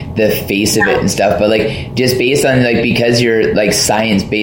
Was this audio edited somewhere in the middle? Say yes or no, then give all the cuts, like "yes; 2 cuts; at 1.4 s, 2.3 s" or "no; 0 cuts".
no; 0 cuts